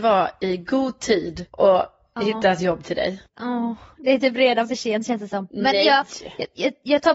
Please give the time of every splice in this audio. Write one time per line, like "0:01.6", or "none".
0:01.5